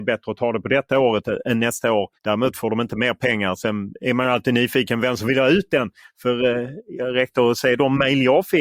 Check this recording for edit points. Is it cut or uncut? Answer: cut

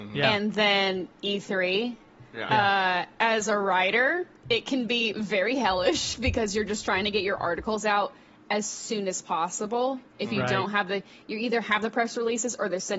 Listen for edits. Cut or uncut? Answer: uncut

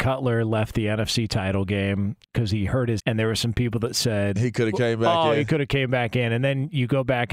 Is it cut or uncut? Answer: cut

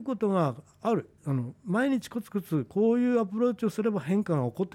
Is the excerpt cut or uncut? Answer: cut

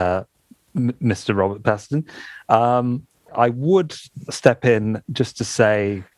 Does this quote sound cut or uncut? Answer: cut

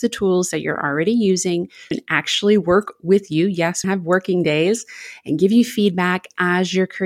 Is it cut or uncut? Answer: cut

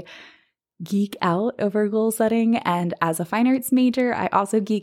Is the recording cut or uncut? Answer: uncut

